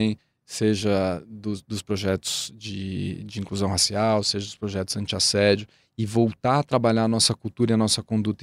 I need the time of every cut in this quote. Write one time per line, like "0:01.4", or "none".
none